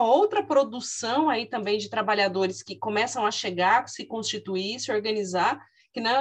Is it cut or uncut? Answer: uncut